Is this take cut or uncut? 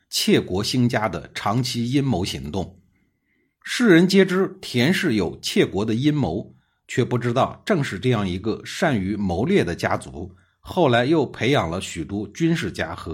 uncut